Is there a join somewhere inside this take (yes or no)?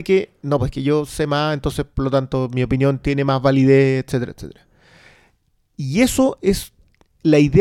no